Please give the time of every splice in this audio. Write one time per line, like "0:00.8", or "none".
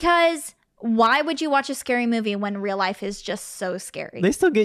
none

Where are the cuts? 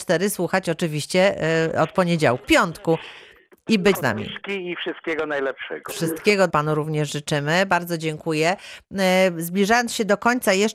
0:02.4
0:03.9
0:06.5

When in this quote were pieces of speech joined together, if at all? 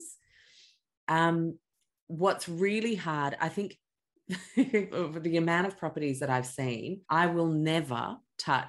0:07.0

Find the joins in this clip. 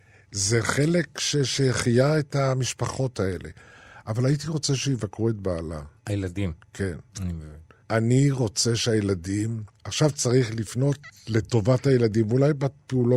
0:06.0
0:07.1
0:07.8
0:09.8

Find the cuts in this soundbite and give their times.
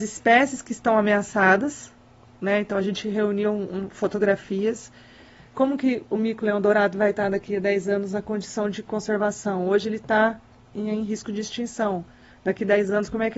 none

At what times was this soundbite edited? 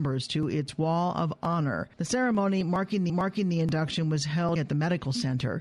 0:01.9
0:03.1
0:04.6

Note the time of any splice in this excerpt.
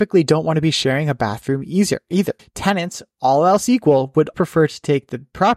0:02.4
0:04.3

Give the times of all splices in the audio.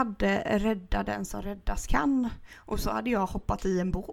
none

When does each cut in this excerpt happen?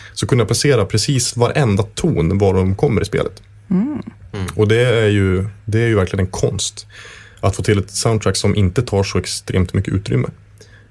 none

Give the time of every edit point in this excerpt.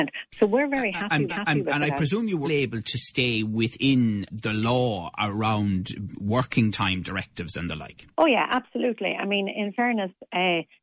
0:01.3
0:02.4
0:04.3
0:08.1

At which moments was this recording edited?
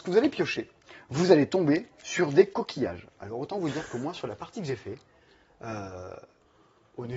none

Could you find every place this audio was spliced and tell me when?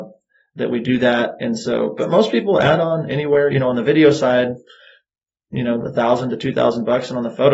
none

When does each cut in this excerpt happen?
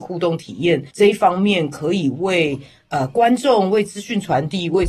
0:00.9

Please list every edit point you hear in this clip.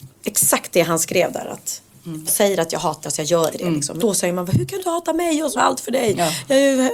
0:02.3
0:03.0
0:03.5
0:04.0
0:04.8
0:05.6

